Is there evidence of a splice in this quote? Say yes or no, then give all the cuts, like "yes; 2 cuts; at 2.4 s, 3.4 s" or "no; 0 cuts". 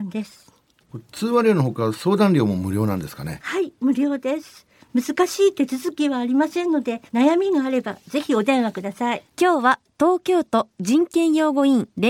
yes; 2 cuts; at 7.1 s, 9.3 s